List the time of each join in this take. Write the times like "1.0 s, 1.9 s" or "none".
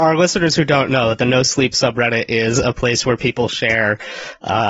none